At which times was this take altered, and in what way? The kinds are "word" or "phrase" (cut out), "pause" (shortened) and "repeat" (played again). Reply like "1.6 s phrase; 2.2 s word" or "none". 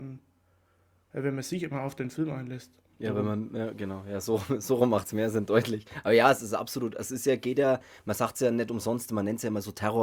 none